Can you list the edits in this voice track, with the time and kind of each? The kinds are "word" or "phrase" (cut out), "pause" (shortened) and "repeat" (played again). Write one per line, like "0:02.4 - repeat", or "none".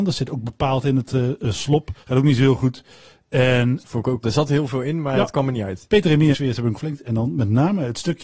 0:02.0 - pause
0:03.8 - word
0:04.2 - word
0:06.3 - phrase
0:06.7 - word